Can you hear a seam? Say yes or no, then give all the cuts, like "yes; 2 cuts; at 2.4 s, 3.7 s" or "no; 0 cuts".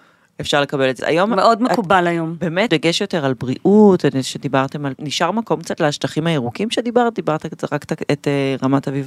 yes; 3 cuts; at 1.0 s, 2.7 s, 4.9 s